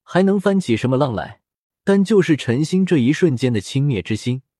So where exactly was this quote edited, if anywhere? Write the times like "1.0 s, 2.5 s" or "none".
1.7 s